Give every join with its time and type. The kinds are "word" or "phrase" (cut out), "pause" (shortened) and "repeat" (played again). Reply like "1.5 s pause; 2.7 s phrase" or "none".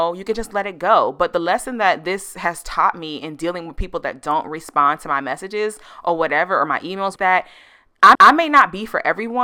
7.2 s phrase; 8.1 s repeat